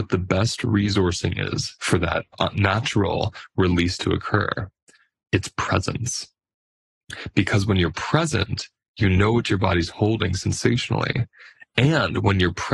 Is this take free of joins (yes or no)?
yes